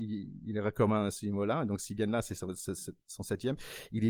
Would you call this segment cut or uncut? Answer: uncut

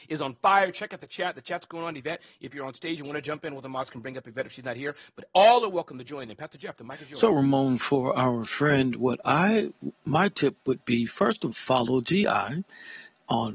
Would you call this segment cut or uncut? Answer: cut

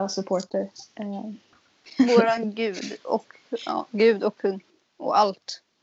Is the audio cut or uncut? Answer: uncut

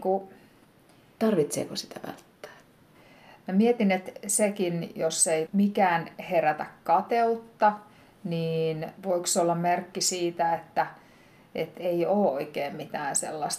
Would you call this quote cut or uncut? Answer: uncut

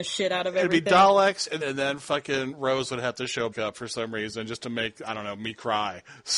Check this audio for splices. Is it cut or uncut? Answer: cut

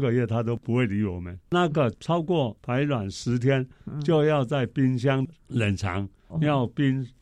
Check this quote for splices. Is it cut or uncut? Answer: cut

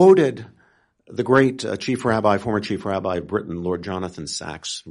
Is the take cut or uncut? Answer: uncut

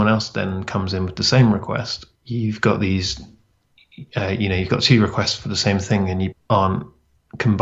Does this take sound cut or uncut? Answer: cut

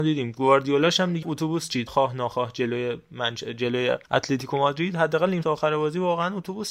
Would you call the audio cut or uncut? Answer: cut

